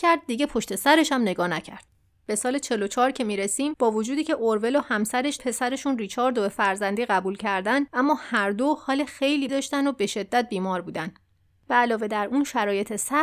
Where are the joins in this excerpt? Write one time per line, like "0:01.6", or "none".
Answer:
0:05.4
0:09.5